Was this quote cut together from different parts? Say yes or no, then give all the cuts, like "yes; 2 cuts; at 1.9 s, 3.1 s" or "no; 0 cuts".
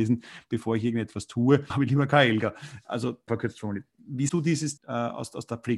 yes; 4 cuts; at 1.7 s, 3.3 s, 4.3 s, 4.8 s